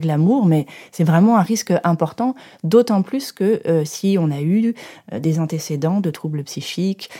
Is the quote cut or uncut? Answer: uncut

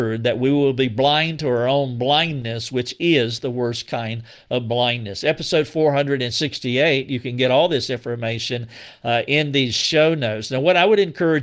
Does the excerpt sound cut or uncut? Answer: uncut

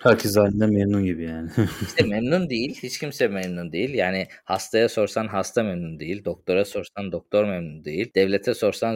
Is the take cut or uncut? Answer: uncut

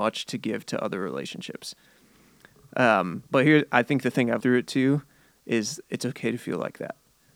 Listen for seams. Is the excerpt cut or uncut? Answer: cut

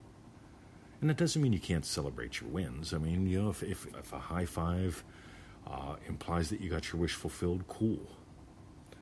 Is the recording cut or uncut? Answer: cut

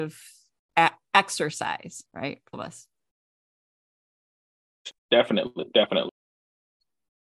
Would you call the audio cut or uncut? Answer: cut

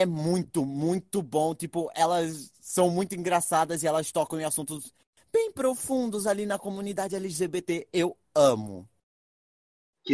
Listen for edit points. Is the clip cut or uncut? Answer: uncut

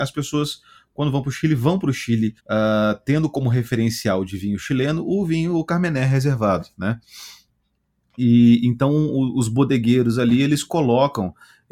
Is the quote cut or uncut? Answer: cut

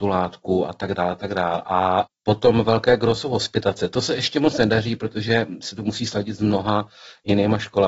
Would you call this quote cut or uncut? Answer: uncut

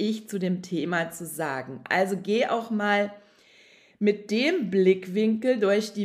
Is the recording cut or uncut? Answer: uncut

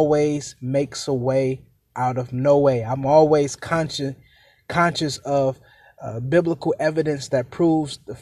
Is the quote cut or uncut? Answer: uncut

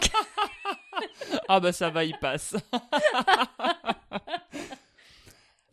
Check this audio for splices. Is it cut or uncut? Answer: uncut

